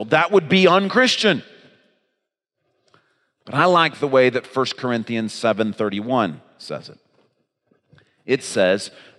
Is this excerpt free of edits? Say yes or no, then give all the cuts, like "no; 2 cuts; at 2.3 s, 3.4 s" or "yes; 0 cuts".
yes; 0 cuts